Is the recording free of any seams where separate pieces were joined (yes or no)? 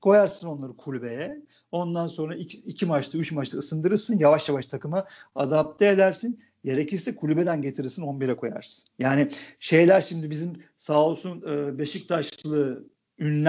yes